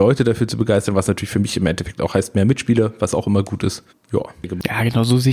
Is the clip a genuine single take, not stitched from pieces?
no; 1 cut; at 3.9 s

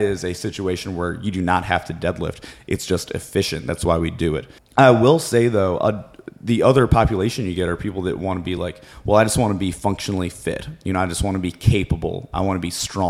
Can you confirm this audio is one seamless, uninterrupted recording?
yes; 0 cuts

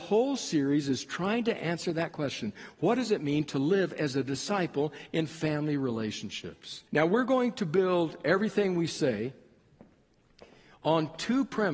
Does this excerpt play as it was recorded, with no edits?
no; 1 cut; at 6.9 s

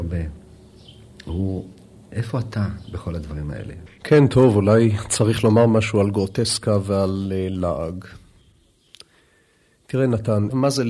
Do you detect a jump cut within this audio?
no; 0 cuts

